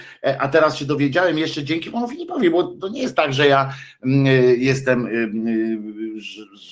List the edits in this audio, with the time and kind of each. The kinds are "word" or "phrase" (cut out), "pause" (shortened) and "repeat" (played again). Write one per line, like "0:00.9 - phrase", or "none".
0:02.8 - word